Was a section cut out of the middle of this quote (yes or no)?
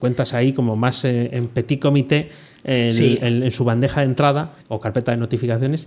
yes